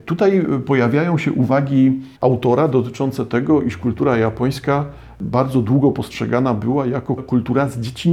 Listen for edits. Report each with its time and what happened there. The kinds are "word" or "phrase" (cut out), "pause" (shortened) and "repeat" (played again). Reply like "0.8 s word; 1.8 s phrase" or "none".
2.1 s pause; 7.2 s word

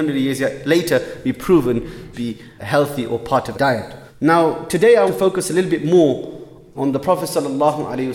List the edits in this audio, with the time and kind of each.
2.1 s word; 2.6 s word; 3.5 s phrase; 4.1 s pause; 5.1 s word; 6.7 s word

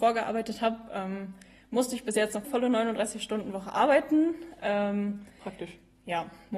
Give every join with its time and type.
2.4 s word

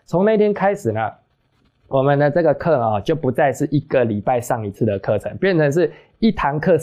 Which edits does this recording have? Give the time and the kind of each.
none

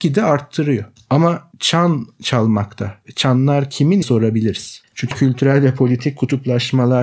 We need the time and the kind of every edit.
1.5 s phrase; 4.0 s phrase; 5.1 s word

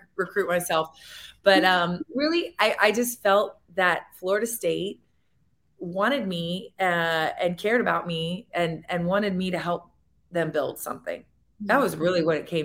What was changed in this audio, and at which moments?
none

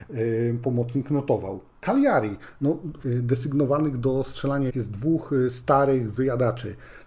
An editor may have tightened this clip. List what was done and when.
1.7 s pause; 3.0 s word; 4.7 s word

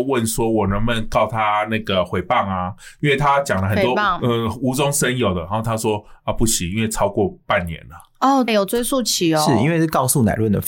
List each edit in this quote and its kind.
4.2 s word; 8.5 s word

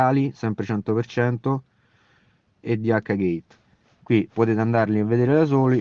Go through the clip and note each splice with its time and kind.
2.6 s word

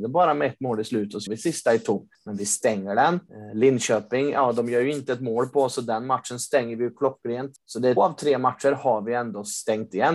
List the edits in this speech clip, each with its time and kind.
1.3 s word; 8.0 s word

